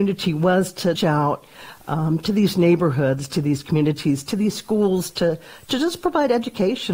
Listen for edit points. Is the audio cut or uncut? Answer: cut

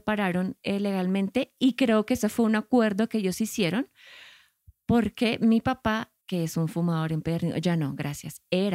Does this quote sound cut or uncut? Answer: uncut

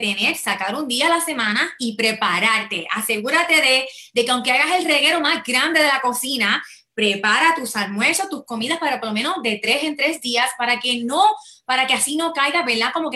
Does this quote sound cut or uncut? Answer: uncut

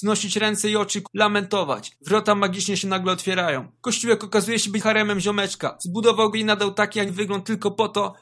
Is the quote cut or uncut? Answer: cut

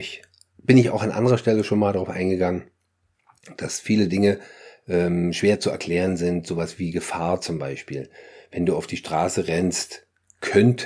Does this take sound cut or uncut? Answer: uncut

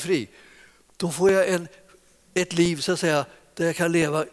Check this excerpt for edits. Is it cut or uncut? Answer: uncut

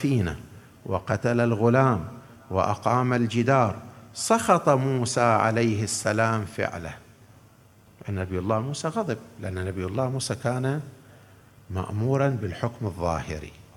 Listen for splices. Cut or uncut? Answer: uncut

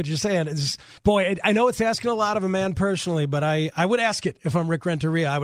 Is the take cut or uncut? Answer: cut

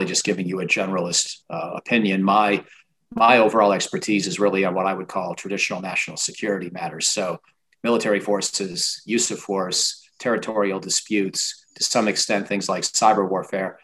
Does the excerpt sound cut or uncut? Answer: cut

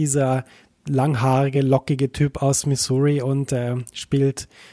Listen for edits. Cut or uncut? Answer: uncut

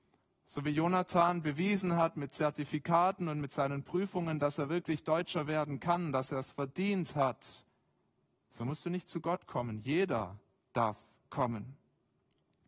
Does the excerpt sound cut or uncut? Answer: uncut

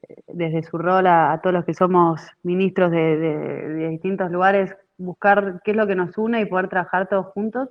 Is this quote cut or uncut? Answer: uncut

